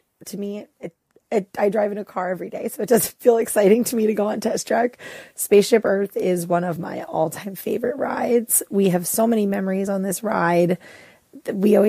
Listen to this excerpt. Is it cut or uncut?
uncut